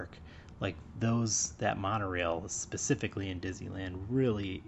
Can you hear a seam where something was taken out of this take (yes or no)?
no